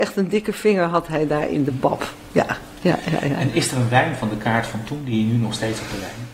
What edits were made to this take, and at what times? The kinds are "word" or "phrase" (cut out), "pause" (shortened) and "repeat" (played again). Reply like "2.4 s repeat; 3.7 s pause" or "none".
none